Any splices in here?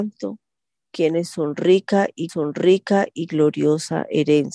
yes; 1 cut; at 2.3 s

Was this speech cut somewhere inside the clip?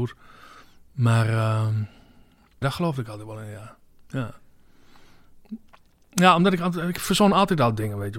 yes; 1 cut; at 2.6 s

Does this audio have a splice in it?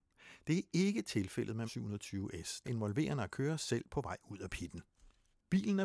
yes; 2 cuts; at 1.7 s, 2.6 s

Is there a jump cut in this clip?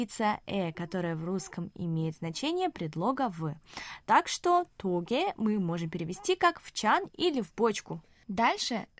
no; 0 cuts

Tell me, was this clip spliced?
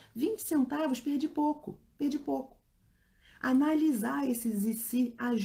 no; 0 cuts

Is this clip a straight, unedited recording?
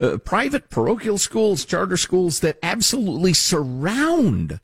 yes; 0 cuts

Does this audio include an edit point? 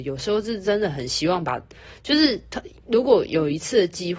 no; 0 cuts

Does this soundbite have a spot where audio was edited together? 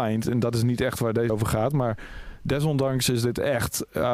yes; 1 cut; at 1.3 s

